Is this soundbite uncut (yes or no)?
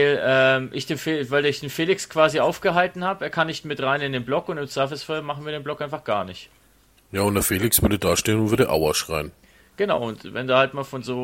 yes